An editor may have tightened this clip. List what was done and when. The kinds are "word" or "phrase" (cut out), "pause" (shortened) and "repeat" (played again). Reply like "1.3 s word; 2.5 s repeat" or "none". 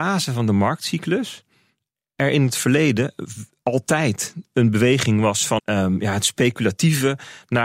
5.6 s word